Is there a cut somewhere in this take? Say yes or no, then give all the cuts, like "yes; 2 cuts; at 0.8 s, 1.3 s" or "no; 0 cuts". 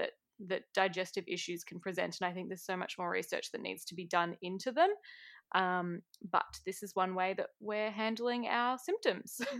no; 0 cuts